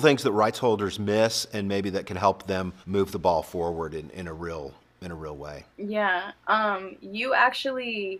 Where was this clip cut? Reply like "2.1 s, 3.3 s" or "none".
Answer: 2.8 s, 5.7 s